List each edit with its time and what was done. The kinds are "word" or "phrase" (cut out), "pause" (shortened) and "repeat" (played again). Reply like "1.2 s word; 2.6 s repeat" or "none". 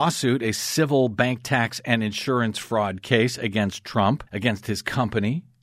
4.3 s pause